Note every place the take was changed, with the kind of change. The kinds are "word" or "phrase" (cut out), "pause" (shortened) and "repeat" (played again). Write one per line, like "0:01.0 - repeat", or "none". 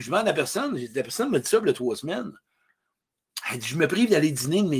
none